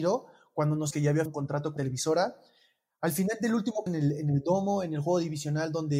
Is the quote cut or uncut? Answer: cut